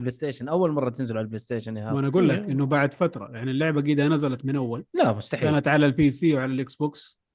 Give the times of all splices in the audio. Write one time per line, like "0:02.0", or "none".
0:04.9